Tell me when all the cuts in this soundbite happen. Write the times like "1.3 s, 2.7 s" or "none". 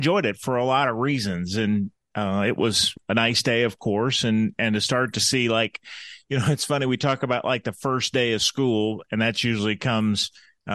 none